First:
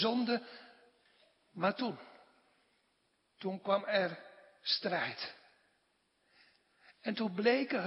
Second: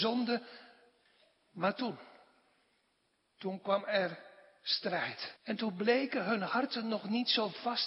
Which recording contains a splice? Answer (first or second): second